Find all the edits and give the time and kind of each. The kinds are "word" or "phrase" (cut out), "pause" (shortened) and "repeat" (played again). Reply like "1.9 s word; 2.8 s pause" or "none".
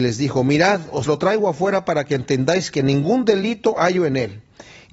none